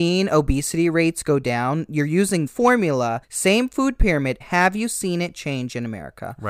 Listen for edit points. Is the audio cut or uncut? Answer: cut